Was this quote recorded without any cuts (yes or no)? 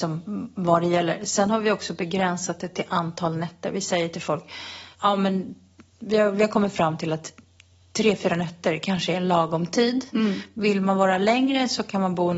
no